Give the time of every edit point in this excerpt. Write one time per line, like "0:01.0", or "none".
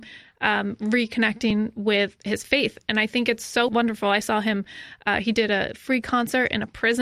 none